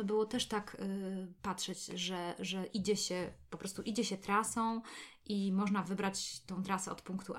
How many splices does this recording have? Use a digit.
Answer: 1